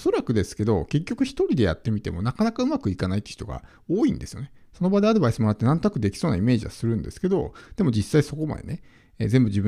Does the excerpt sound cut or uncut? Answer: uncut